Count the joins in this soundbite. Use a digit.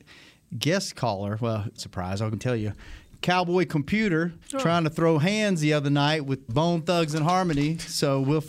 4